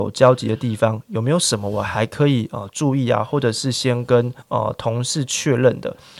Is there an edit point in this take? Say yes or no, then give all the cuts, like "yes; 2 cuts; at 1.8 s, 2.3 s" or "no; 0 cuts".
yes; 1 cut; at 4.4 s